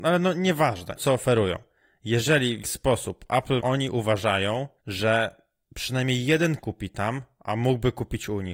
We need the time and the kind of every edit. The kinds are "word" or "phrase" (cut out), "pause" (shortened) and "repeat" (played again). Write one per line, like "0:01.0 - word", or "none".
0:01.0 - word
0:02.6 - word
0:03.6 - phrase
0:04.8 - pause
0:06.6 - word

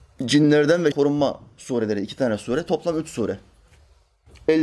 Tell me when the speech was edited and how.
0:00.9 - word

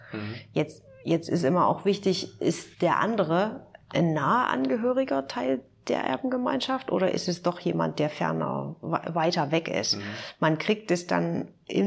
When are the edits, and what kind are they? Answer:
0:02.7 - pause

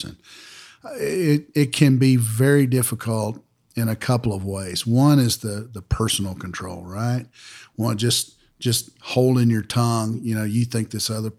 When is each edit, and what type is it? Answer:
none

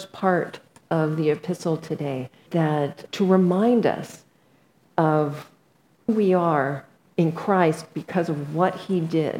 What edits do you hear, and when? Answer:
0:02.5 - word
0:03.1 - word
0:06.1 - word

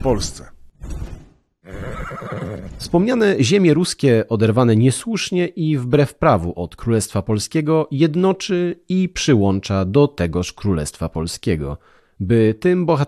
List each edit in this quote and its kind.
none

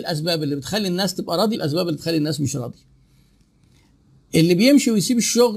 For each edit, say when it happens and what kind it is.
0:01.5 - word

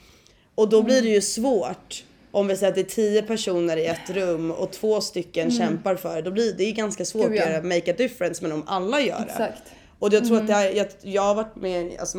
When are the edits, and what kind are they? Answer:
none

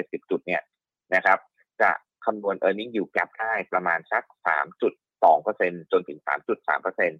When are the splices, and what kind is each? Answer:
none

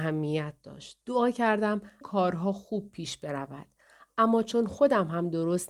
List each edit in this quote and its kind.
0:01.0 - pause
0:02.0 - word

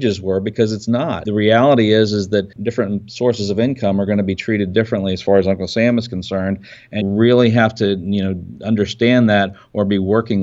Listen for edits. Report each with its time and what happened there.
0:01.3 - phrase
0:02.5 - pause
0:07.0 - word

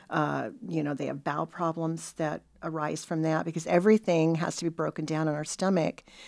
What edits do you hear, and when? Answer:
none

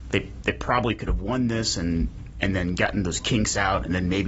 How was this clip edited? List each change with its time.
none

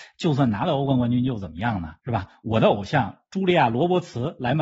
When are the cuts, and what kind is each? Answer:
0:02.0 - pause

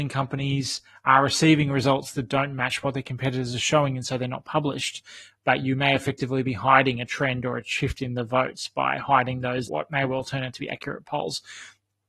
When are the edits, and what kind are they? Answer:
0:09.7 - word

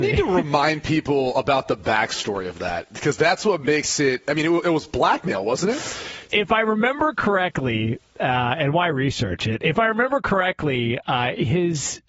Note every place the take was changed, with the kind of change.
0:06.3 - word

